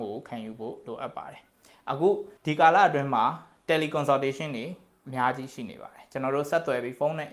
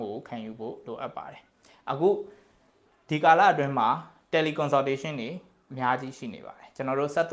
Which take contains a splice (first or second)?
first